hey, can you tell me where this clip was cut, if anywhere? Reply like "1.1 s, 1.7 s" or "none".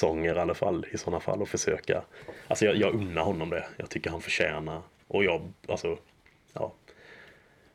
none